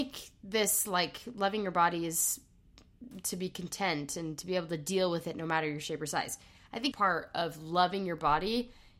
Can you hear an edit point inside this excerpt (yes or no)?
yes